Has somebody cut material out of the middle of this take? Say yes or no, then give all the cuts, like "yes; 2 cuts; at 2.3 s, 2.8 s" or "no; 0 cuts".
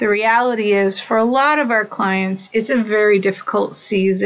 no; 0 cuts